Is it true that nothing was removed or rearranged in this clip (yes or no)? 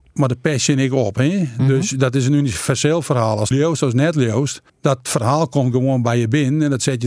no